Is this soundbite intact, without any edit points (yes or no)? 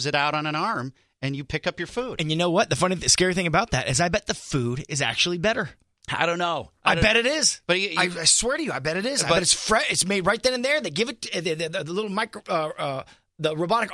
yes